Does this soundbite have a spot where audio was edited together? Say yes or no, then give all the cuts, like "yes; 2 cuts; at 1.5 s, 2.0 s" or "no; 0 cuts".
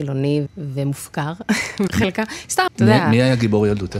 yes; 2 cuts; at 1.9 s, 2.7 s